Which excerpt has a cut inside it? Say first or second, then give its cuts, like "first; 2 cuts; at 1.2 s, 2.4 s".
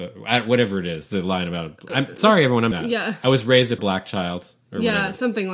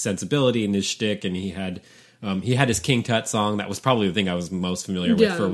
first; 3 cuts; at 1.9 s, 2.7 s, 3.8 s